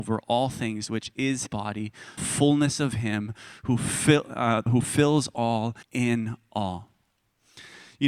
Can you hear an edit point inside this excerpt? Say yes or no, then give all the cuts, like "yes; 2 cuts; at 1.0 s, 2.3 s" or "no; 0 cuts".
yes; 4 cuts; at 1.5 s, 2.2 s, 4.7 s, 5.8 s